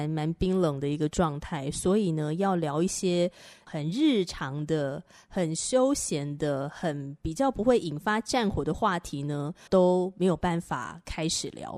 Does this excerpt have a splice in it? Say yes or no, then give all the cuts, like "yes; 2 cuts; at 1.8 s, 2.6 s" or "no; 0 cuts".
yes; 1 cut; at 9.7 s